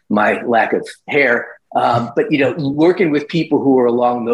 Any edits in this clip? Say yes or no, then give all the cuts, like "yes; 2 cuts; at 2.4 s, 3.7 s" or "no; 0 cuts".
no; 0 cuts